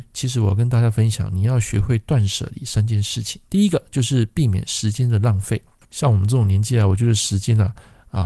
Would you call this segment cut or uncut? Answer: cut